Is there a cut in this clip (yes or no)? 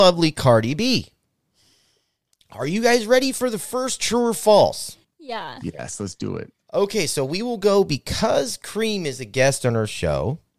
yes